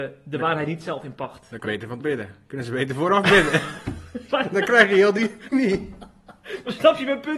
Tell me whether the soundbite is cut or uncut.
cut